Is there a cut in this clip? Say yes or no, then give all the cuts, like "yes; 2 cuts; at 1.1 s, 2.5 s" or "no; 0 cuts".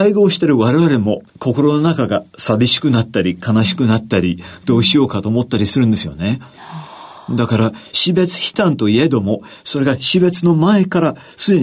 yes; 1 cut; at 1.3 s